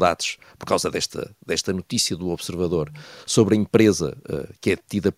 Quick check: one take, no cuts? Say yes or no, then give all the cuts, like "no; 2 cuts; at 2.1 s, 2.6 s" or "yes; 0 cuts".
yes; 0 cuts